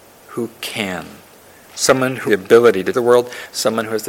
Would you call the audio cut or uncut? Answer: cut